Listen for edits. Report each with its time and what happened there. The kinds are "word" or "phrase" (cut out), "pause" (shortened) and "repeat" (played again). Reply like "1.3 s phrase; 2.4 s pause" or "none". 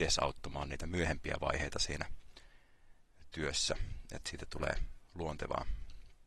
none